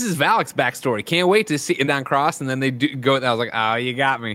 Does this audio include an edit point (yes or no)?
yes